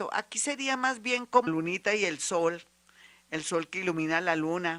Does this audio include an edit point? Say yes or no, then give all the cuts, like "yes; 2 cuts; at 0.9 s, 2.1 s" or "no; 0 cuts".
yes; 1 cut; at 1.5 s